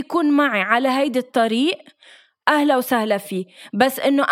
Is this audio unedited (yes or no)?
yes